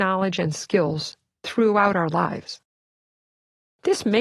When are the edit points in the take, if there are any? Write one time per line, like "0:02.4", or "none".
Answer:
none